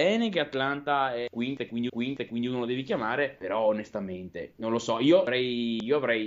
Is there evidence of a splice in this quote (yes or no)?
yes